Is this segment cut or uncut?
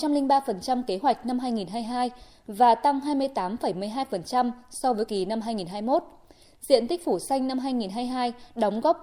cut